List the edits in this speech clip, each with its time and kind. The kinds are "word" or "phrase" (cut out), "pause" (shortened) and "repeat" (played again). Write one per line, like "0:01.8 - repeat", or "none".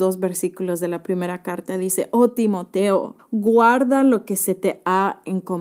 0:03.2 - pause